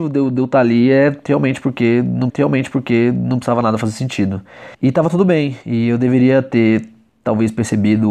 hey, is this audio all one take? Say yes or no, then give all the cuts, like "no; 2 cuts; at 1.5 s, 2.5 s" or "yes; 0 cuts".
no; 3 cuts; at 2.3 s, 4.7 s, 5.6 s